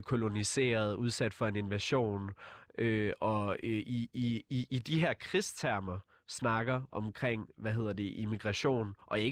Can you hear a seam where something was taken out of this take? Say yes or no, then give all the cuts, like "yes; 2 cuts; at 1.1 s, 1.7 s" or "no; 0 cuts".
no; 0 cuts